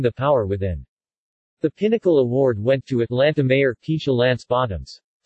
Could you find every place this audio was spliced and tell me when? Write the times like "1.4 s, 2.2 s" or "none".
none